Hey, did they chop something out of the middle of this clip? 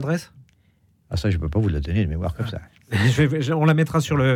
no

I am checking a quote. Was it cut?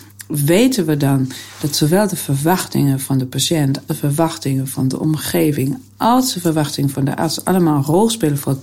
yes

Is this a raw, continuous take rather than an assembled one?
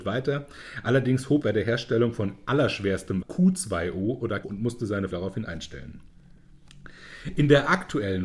no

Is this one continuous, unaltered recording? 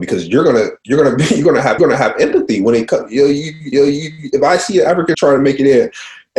no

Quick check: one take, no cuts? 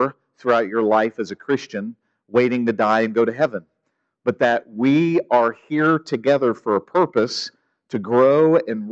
yes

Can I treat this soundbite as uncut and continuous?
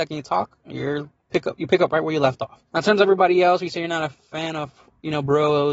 no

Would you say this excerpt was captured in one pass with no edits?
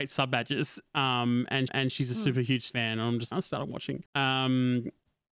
no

